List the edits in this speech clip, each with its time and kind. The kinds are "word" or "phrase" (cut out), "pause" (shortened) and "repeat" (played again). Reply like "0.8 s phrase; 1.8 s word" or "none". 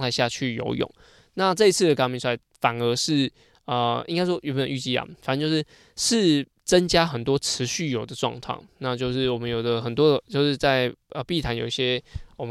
none